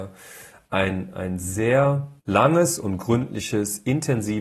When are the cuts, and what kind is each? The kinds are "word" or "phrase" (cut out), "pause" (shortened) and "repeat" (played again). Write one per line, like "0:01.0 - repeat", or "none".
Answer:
0:02.2 - pause